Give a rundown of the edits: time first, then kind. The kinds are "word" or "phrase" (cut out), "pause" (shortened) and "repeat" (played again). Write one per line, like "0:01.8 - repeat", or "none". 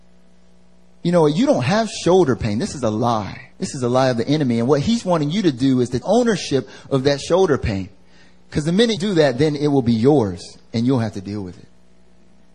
0:03.5 - pause
0:06.0 - word
0:09.0 - word